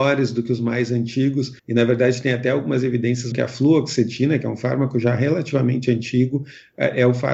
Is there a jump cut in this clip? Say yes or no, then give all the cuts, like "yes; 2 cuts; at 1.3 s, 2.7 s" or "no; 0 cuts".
yes; 2 cuts; at 1.6 s, 3.3 s